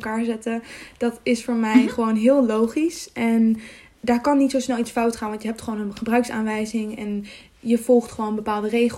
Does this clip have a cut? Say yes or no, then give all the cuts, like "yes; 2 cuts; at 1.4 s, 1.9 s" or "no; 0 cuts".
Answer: no; 0 cuts